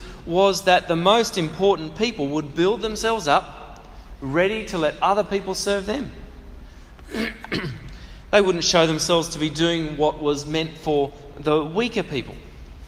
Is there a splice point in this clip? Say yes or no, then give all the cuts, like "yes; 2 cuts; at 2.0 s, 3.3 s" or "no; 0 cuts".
no; 0 cuts